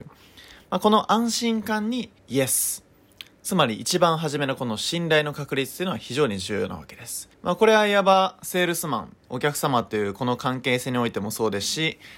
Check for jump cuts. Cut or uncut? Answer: cut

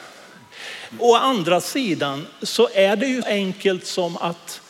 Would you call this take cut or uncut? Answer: cut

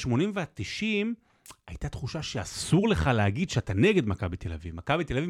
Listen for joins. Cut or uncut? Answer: uncut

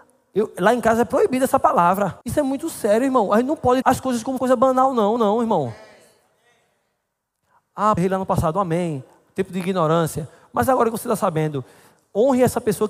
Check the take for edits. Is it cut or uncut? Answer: cut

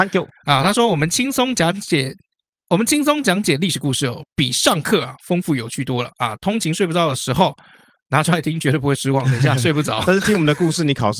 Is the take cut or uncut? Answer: uncut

